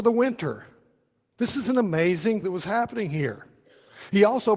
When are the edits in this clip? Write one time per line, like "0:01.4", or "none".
0:02.4